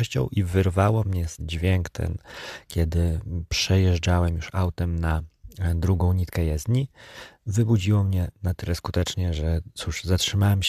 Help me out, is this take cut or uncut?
cut